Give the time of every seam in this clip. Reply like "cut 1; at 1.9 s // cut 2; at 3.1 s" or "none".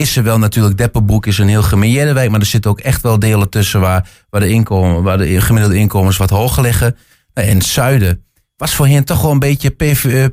none